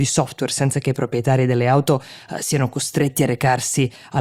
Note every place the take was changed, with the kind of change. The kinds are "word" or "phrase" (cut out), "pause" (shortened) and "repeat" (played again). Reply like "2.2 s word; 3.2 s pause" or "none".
none